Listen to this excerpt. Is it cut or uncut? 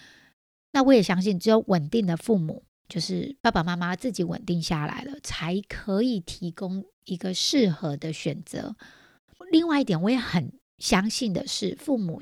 uncut